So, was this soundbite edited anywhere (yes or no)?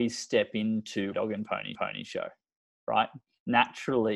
yes